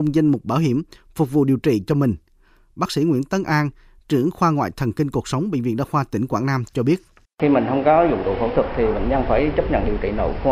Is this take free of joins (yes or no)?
yes